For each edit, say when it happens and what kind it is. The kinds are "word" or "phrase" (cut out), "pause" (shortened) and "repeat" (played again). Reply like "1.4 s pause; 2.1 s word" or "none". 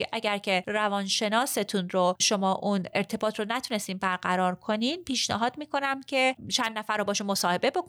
none